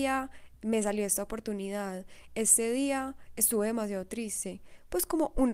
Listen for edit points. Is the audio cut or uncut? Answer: uncut